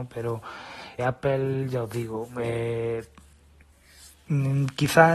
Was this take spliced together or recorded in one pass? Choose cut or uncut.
cut